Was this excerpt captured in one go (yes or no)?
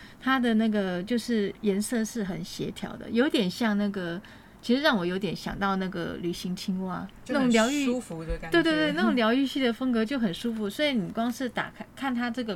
no